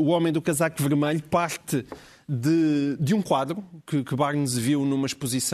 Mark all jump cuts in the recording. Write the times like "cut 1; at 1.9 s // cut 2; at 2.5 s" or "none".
none